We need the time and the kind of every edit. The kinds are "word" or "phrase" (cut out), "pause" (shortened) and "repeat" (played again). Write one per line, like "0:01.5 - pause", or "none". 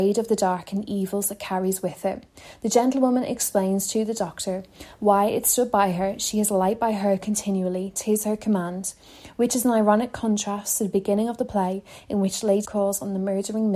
0:12.6 - word